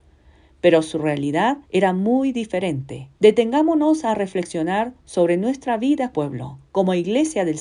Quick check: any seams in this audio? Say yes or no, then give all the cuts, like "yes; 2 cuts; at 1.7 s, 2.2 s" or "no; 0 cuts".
yes; 3 cuts; at 1.6 s, 3.1 s, 6.1 s